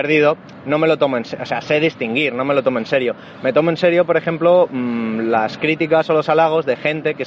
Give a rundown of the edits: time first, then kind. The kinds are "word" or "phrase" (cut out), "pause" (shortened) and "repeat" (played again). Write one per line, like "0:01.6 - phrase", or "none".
none